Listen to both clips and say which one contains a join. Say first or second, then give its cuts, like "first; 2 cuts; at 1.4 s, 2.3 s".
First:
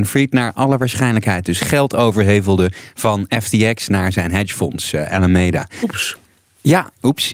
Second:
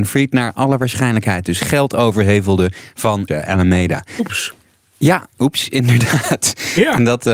second; 1 cut; at 3.3 s